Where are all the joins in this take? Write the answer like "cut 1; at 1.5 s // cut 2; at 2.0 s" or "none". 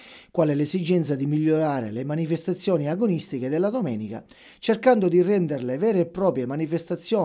none